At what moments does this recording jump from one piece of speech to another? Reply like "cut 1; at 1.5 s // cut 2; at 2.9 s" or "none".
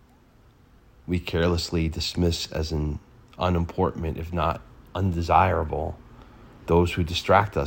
none